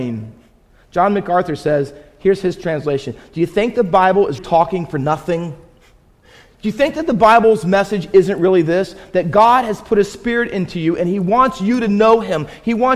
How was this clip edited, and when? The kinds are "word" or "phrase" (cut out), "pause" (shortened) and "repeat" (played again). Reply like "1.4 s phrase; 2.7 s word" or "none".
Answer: 4.4 s word

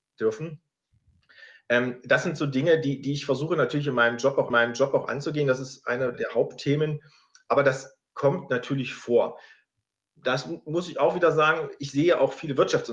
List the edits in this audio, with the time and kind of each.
4.5 s repeat; 6.1 s word

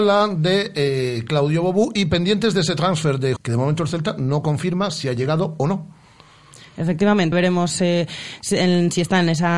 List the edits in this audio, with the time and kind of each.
3.4 s word; 7.3 s word

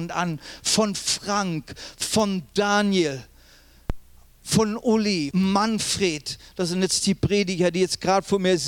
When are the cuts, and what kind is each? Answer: 5.3 s word

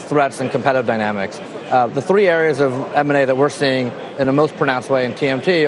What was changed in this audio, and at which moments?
none

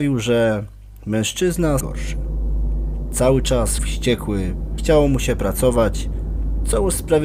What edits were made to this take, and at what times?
1.8 s phrase; 3.8 s word; 4.8 s word

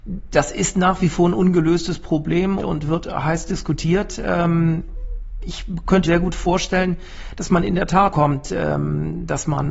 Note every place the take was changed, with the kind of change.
2.6 s word; 6.0 s word; 8.1 s word

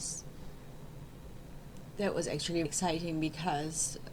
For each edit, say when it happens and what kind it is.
2.7 s word

